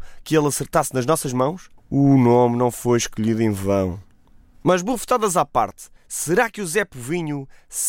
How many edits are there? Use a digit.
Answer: 2